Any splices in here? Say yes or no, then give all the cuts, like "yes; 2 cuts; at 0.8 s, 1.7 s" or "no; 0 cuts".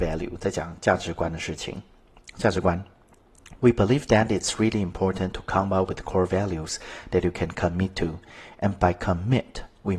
no; 0 cuts